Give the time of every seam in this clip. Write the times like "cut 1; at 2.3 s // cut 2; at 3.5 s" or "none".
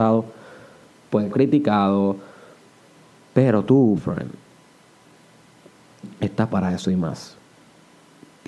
cut 1; at 1.3 s // cut 2; at 2.6 s // cut 3; at 4.0 s // cut 4; at 6.5 s